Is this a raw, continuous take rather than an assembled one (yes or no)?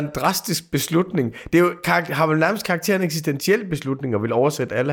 yes